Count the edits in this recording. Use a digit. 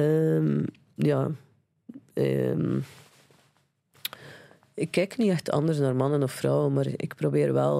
0